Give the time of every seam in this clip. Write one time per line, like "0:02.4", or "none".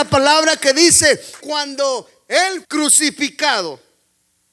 0:01.4
0:02.6